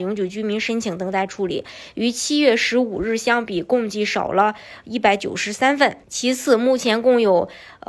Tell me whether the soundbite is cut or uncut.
cut